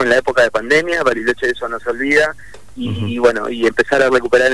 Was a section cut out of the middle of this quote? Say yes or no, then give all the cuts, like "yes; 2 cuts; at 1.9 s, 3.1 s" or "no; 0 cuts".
no; 0 cuts